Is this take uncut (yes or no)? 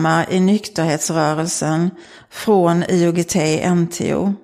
yes